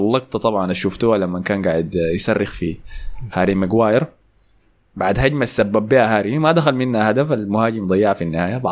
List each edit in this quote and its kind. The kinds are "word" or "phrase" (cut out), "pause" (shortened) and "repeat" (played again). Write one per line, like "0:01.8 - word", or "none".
none